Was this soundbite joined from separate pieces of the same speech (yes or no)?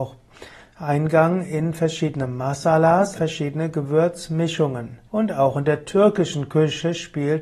yes